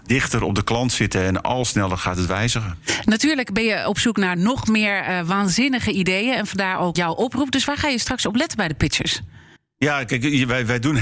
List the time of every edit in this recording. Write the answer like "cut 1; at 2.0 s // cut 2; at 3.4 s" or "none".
cut 1; at 6.9 s // cut 2; at 9.6 s